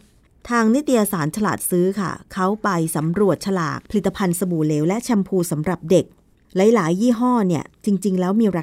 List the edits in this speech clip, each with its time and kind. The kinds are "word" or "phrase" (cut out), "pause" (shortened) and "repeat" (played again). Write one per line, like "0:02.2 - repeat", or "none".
0:03.9 - pause